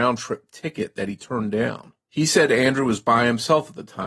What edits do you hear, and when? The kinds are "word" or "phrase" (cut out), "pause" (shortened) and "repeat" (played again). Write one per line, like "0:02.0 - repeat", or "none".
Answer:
0:02.0 - pause